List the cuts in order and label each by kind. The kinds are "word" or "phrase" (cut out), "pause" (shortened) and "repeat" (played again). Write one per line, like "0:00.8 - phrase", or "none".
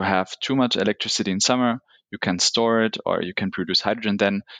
none